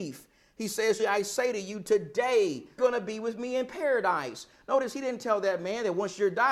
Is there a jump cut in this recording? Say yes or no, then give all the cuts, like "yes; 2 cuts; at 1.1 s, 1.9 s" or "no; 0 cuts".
yes; 2 cuts; at 1.0 s, 2.8 s